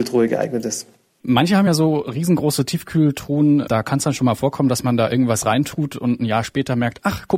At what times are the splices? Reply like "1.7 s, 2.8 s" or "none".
none